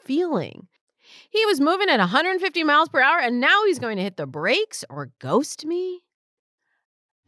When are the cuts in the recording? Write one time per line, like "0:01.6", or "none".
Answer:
none